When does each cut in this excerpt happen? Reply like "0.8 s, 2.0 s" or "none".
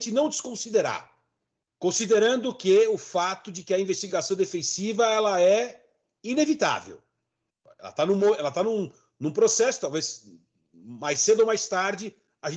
none